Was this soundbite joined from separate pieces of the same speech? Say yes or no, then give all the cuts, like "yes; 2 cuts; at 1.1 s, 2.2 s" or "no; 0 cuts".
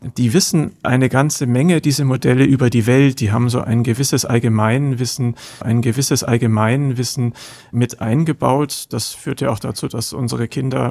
yes; 1 cut; at 5.6 s